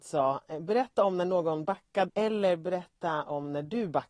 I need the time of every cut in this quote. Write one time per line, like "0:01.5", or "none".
0:02.1